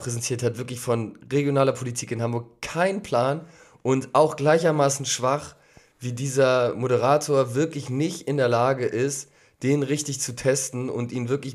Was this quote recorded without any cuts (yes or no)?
yes